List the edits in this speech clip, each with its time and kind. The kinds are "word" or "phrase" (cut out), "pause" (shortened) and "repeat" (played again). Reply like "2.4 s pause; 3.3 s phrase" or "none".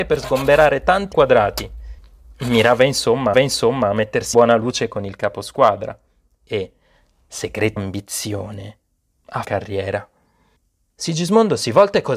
1.1 s word; 3.3 s repeat; 4.3 s word; 7.8 s word; 9.4 s word